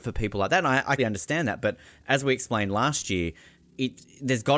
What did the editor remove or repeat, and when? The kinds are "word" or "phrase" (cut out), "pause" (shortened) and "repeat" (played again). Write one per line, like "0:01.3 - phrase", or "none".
0:01.0 - word